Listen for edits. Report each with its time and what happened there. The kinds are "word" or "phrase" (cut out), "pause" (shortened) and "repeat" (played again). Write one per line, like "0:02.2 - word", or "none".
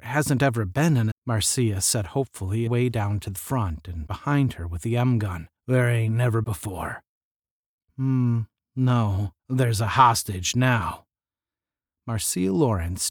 0:01.1 - word
0:02.7 - phrase
0:03.4 - phrase
0:04.1 - word
0:05.6 - pause
0:06.4 - phrase
0:09.4 - pause